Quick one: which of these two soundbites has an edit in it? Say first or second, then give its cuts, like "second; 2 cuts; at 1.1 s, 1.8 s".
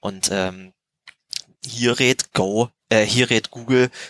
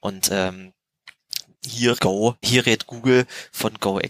second; 2 cuts; at 2.0 s, 2.4 s